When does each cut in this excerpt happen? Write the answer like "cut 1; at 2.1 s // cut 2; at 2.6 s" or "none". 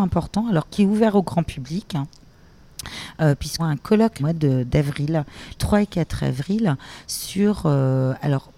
cut 1; at 3.6 s // cut 2; at 4.2 s // cut 3; at 5.5 s